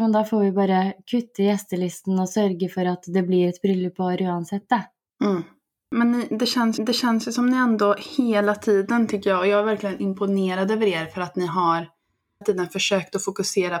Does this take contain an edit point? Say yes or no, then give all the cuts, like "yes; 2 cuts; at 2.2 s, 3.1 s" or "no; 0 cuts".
yes; 3 cuts; at 5.1 s, 6.8 s, 12.4 s